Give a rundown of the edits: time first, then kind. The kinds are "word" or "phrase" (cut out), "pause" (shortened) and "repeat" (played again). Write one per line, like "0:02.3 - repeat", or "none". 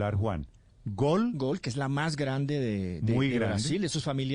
none